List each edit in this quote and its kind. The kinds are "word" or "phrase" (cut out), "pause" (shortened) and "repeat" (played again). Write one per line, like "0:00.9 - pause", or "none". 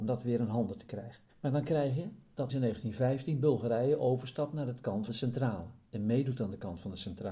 0:01.3 - pause
0:02.5 - word
0:05.1 - word